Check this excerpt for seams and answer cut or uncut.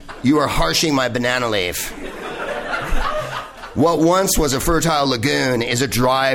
uncut